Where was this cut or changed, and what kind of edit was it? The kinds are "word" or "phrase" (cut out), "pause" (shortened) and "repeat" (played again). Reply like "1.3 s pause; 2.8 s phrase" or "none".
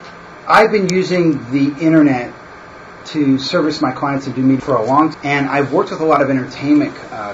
4.6 s word; 5.1 s word